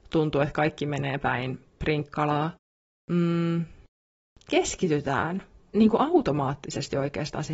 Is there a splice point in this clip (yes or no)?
no